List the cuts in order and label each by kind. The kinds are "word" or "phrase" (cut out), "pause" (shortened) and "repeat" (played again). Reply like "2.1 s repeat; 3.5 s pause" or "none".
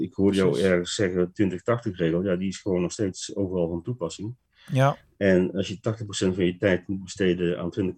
none